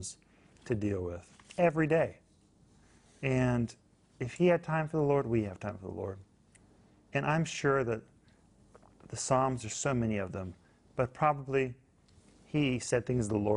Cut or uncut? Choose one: uncut